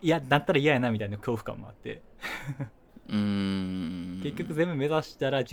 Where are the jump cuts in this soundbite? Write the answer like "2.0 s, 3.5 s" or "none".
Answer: none